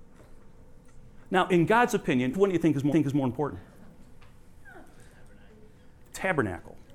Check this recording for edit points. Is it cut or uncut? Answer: cut